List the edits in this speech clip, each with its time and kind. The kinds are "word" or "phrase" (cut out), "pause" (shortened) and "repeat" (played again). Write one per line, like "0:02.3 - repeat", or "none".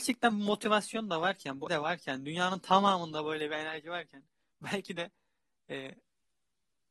0:01.7 - word